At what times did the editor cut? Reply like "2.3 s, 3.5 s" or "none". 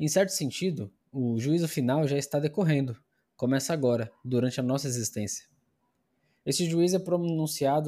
none